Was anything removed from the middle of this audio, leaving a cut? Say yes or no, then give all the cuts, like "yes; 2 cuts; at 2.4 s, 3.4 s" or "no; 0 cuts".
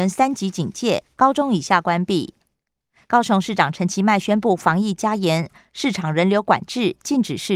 no; 0 cuts